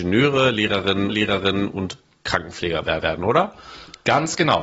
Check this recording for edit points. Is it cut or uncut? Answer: cut